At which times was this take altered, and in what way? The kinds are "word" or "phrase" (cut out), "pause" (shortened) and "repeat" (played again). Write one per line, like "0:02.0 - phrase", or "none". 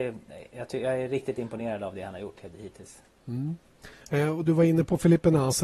none